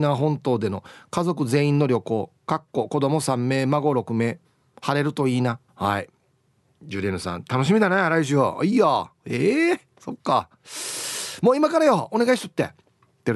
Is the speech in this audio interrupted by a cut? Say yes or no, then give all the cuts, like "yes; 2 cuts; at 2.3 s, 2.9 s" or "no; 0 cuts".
yes; 1 cut; at 5.7 s